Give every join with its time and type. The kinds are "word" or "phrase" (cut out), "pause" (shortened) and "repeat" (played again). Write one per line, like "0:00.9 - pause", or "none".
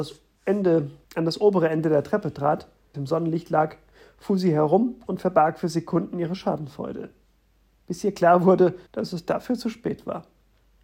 0:01.0 - pause
0:02.9 - word
0:08.9 - pause